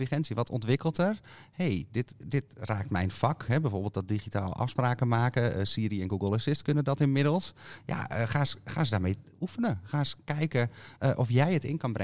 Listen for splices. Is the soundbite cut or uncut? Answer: uncut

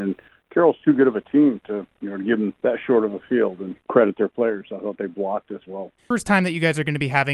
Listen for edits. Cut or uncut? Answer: cut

